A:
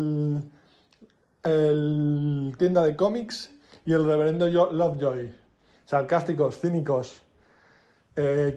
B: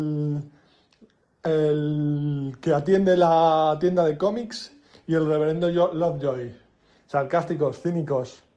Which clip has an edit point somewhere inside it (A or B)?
A